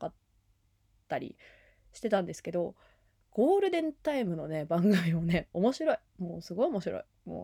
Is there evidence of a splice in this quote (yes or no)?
no